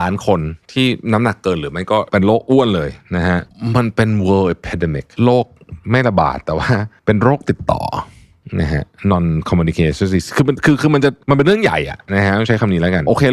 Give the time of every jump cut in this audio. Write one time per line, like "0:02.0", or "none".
0:05.1